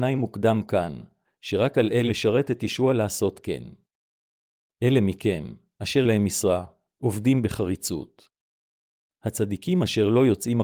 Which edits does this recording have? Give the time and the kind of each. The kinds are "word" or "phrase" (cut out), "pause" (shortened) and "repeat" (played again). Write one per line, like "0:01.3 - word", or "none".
0:01.2 - word
0:02.1 - word
0:06.0 - word